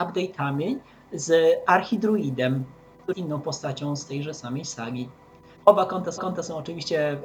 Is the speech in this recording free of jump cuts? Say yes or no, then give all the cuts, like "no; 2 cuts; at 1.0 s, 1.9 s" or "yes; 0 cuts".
no; 3 cuts; at 3.1 s, 5.6 s, 6.2 s